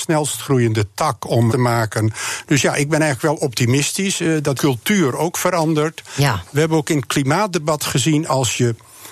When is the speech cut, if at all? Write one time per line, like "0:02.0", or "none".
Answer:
0:01.5
0:04.6